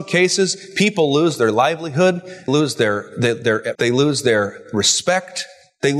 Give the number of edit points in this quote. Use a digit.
2